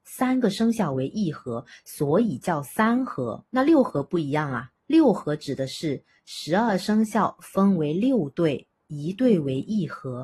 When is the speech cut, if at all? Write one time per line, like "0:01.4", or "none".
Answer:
0:03.5
0:04.8